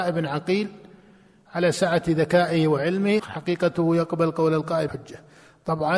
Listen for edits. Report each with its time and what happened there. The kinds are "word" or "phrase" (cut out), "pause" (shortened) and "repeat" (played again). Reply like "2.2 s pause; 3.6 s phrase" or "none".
3.2 s phrase; 4.9 s word